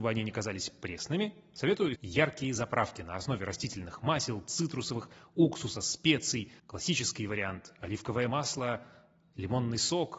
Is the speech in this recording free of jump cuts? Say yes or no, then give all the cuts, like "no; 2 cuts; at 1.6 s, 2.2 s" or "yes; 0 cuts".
no; 2 cuts; at 1.9 s, 6.6 s